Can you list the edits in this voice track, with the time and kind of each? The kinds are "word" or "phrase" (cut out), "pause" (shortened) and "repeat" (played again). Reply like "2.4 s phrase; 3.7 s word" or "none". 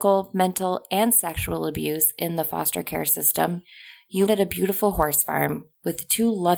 4.3 s word